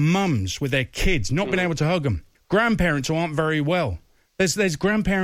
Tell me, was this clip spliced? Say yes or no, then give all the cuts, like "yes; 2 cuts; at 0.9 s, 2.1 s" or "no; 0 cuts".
no; 0 cuts